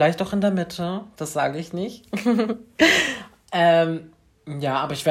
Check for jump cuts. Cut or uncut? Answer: uncut